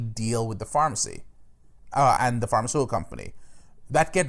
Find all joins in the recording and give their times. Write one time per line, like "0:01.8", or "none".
0:02.2